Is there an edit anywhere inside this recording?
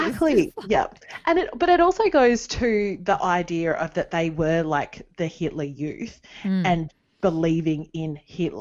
no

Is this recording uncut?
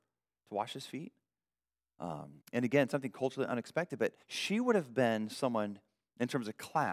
no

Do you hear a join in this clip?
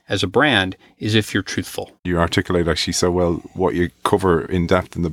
yes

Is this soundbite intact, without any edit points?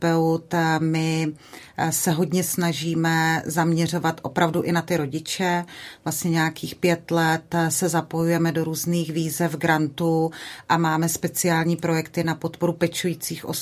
yes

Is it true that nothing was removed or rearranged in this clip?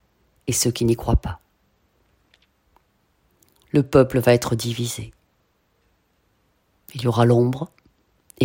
yes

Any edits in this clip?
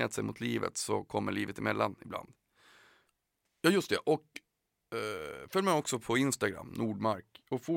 no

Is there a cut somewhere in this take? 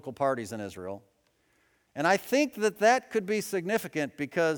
no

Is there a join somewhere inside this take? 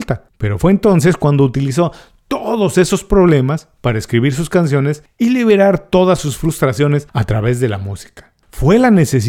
no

